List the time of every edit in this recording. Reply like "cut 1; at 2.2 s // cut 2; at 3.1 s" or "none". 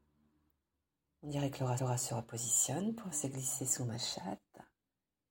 cut 1; at 1.8 s // cut 2; at 3.1 s